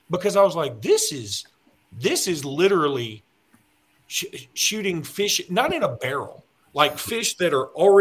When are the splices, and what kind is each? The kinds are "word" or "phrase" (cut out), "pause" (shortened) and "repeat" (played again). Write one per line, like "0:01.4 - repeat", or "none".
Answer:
none